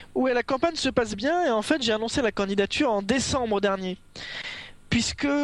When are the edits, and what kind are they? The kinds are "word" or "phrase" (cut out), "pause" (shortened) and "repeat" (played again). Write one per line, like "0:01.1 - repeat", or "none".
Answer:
none